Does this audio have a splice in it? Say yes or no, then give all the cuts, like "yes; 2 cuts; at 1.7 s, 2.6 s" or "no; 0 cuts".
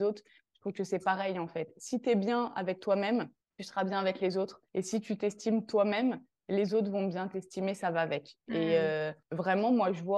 yes; 3 cuts; at 3.4 s, 4.7 s, 9.2 s